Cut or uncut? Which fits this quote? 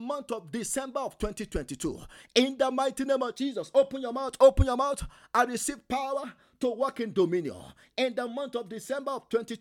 uncut